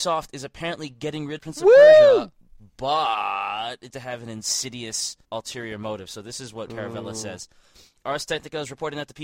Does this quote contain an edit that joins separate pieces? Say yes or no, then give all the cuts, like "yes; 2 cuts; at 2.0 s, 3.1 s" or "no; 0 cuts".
yes; 4 cuts; at 1.4 s, 3.9 s, 5.2 s, 6.7 s